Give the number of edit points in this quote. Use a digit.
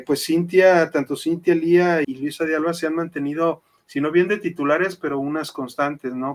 1